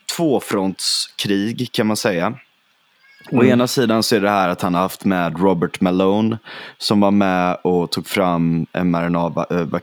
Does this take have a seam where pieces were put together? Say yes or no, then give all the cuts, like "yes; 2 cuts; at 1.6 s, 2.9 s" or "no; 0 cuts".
no; 0 cuts